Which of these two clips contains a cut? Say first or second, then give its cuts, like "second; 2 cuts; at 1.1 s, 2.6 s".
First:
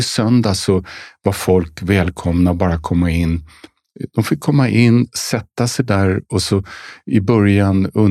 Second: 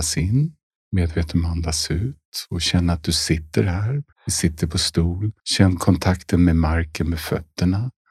second; 2 cuts; at 4.1 s, 5.4 s